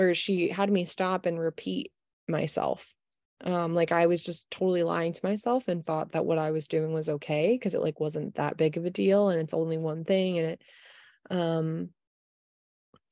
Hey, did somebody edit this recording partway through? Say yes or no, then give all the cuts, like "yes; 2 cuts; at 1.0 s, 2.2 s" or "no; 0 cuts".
no; 0 cuts